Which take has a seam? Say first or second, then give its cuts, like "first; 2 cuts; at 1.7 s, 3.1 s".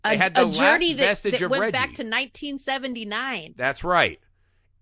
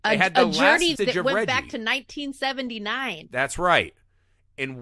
second; 1 cut; at 1.0 s